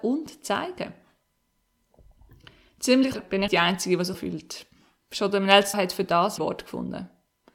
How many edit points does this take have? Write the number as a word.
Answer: five